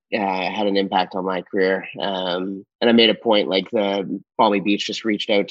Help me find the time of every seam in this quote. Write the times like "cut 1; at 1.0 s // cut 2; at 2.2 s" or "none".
cut 1; at 2.7 s

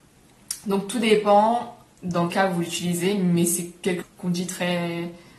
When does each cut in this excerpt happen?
cut 1; at 2.3 s // cut 2; at 4.0 s

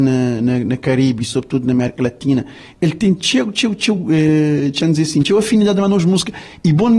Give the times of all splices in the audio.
none

